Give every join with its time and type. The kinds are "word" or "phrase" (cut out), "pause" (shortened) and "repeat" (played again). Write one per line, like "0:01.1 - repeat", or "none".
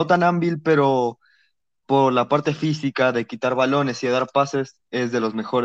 none